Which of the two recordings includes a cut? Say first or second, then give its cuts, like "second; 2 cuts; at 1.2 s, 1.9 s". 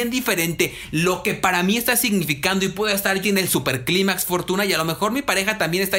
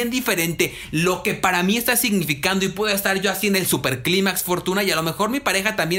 first; 1 cut; at 3.2 s